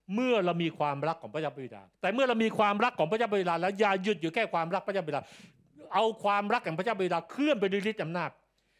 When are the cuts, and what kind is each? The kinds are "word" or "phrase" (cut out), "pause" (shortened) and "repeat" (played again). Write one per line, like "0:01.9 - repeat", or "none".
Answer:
0:01.9 - pause